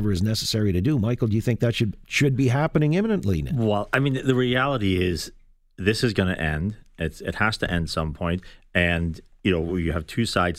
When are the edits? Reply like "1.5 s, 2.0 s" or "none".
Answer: none